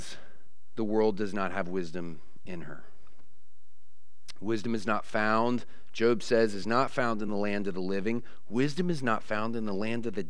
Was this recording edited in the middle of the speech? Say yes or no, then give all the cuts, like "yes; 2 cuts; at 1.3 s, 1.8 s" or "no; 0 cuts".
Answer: no; 0 cuts